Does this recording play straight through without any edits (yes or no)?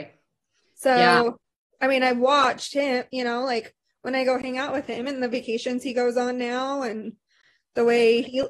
yes